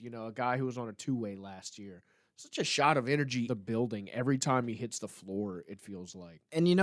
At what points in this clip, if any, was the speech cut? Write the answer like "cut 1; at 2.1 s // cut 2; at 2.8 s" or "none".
cut 1; at 3.5 s

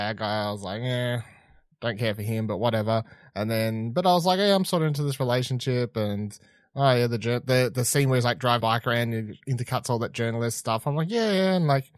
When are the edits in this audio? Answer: cut 1; at 8.6 s

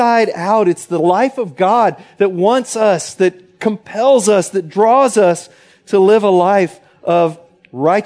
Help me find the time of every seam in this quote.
none

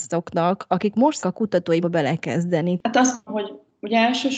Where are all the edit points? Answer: cut 1; at 1.2 s // cut 2; at 1.8 s // cut 3; at 3.3 s

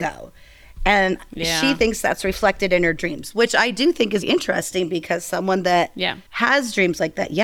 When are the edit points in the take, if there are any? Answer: cut 1; at 4.2 s

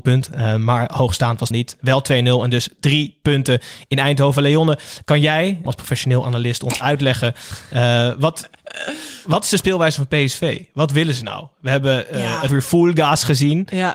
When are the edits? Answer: cut 1; at 1.5 s // cut 2; at 5.7 s // cut 3; at 12.5 s

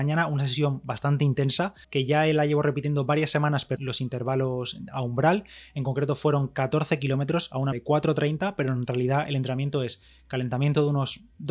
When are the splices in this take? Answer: cut 1; at 1.8 s // cut 2; at 3.8 s // cut 3; at 7.7 s

